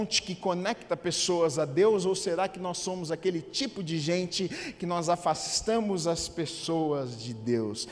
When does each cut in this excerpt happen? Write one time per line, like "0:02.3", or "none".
none